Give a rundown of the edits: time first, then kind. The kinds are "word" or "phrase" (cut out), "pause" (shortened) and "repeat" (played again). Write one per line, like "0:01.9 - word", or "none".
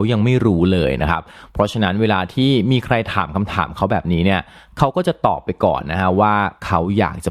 none